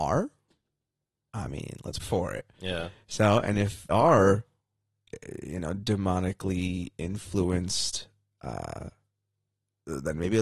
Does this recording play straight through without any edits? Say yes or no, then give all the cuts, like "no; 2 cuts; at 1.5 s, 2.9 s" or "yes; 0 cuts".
no; 2 cuts; at 2.0 s, 3.9 s